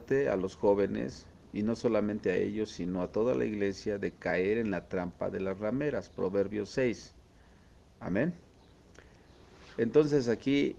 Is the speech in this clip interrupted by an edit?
no; 0 cuts

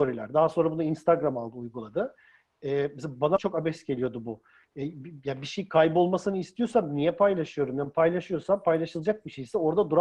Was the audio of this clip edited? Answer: yes; 1 cut; at 3.4 s

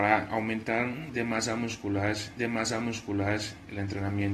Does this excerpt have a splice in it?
yes; 1 cut; at 2.4 s

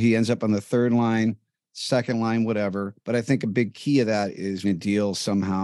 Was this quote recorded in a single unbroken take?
no; 2 cuts; at 3.0 s, 4.6 s

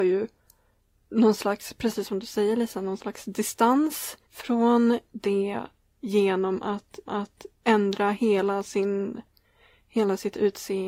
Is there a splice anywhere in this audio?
yes; 2 cuts; at 4.3 s, 7.1 s

